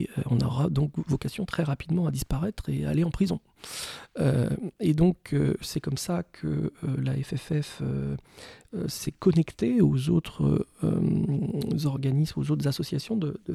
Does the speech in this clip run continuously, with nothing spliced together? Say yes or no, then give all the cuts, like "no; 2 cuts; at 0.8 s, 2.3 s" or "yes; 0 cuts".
yes; 0 cuts